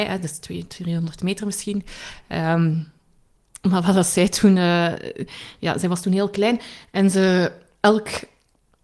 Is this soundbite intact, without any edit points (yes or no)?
yes